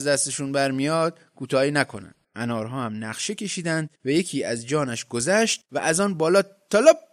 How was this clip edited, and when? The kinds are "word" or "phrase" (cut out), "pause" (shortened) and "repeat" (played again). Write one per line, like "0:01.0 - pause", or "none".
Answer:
0:02.2 - pause
0:04.0 - pause
0:05.7 - pause